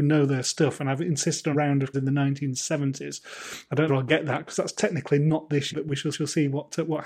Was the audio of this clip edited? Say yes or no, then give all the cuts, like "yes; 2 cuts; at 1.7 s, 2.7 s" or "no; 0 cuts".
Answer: yes; 5 cuts; at 1.5 s, 1.9 s, 3.9 s, 5.7 s, 6.1 s